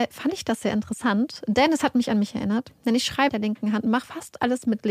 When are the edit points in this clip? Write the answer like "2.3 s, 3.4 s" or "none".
3.3 s